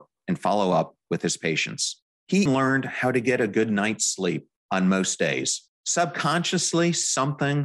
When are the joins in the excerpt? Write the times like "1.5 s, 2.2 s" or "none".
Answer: 2.5 s